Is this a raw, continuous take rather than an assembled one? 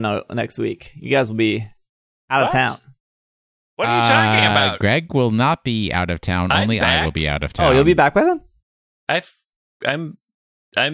yes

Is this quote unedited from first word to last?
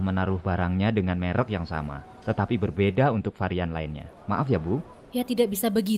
yes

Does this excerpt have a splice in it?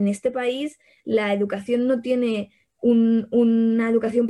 no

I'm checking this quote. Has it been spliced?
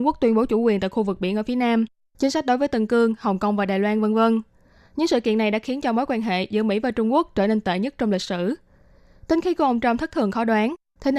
no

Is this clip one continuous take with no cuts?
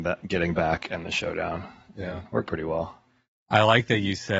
no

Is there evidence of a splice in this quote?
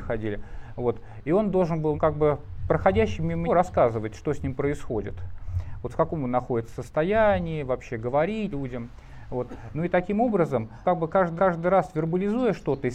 yes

